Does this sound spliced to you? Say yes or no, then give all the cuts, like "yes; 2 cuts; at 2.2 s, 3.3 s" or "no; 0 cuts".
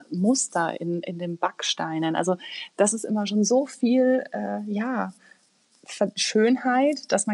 no; 0 cuts